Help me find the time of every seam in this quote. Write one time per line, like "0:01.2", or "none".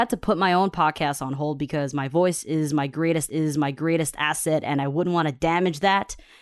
0:03.3